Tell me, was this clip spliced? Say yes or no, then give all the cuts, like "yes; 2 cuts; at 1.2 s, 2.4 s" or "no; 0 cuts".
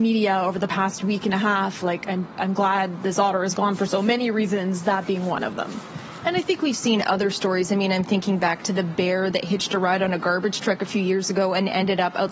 no; 0 cuts